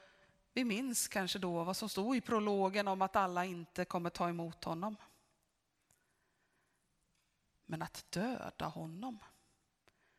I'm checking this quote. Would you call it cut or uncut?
uncut